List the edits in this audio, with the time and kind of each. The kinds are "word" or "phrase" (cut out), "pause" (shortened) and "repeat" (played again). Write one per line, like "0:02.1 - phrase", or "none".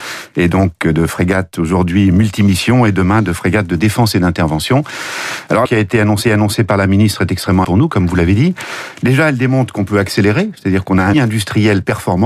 0:05.7 - word
0:06.2 - repeat
0:07.6 - word
0:11.1 - word